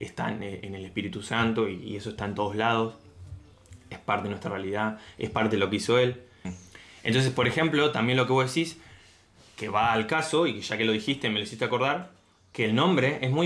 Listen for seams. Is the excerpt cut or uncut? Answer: uncut